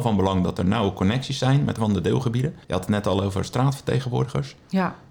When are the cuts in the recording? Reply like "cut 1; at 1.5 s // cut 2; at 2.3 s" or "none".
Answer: cut 1; at 1.8 s // cut 2; at 2.6 s

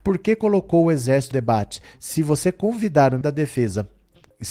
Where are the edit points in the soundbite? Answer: cut 1; at 1.3 s // cut 2; at 3.2 s

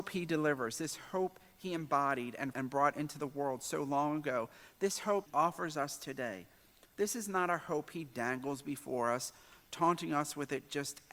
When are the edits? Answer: cut 1; at 2.5 s // cut 2; at 5.3 s // cut 3; at 6.9 s

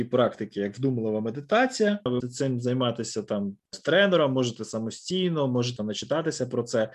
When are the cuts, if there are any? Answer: cut 1; at 2.2 s // cut 2; at 3.7 s // cut 3; at 5.8 s

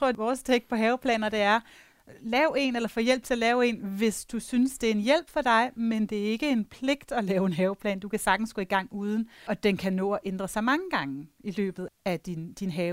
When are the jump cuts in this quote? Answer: cut 1; at 11.9 s

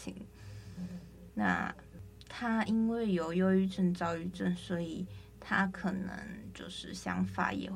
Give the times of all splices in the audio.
none

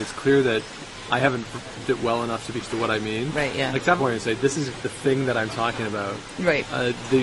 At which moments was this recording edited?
cut 1; at 1.8 s // cut 2; at 2.6 s // cut 3; at 4.0 s // cut 4; at 4.7 s

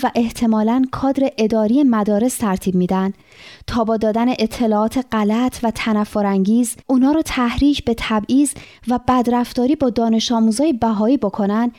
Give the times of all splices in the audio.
cut 1; at 6.8 s

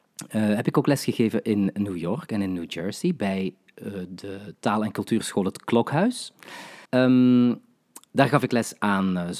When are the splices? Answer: cut 1; at 6.9 s

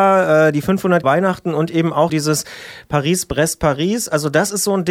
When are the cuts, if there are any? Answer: cut 1; at 1.0 s // cut 2; at 2.1 s

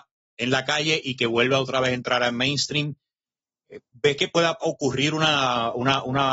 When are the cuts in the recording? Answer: none

